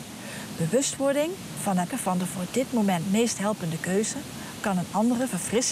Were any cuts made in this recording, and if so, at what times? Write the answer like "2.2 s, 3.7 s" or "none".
1.9 s